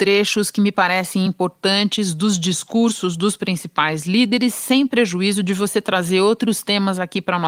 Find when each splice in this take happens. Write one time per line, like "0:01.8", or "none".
none